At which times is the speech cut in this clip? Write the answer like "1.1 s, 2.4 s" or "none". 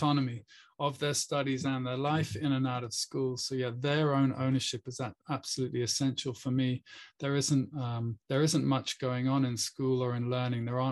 8.2 s